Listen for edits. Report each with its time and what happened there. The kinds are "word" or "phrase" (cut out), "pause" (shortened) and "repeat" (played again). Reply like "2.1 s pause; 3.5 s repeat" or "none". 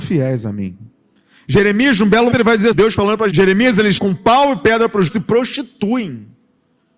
2.3 s word; 2.7 s word; 3.3 s word; 4.0 s word; 5.1 s word